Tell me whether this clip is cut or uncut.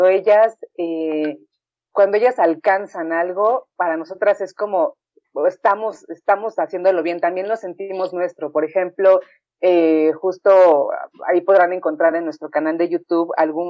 uncut